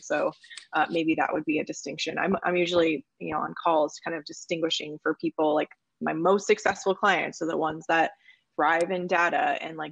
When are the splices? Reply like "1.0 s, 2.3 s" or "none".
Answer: none